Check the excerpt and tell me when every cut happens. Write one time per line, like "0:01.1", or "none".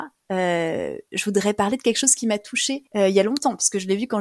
0:02.9